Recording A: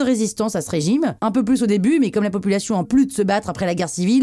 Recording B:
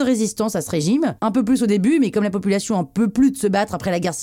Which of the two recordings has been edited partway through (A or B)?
A